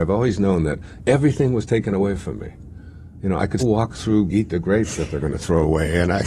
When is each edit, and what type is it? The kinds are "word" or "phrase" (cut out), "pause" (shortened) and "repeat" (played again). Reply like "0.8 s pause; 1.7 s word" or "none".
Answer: 1.0 s word; 3.6 s word; 4.3 s phrase